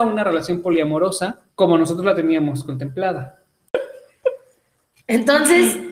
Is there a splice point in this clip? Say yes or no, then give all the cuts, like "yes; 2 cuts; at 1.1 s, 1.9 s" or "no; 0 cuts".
yes; 1 cut; at 1.5 s